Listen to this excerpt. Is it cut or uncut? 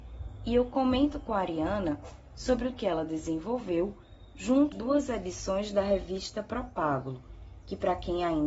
cut